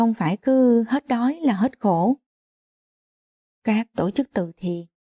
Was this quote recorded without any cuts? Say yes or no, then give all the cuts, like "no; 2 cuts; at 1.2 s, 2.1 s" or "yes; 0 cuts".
yes; 0 cuts